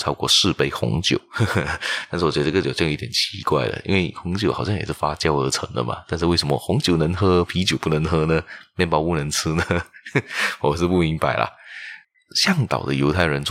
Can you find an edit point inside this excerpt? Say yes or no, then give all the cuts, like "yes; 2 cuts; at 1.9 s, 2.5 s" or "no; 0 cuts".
yes; 1 cut; at 12.1 s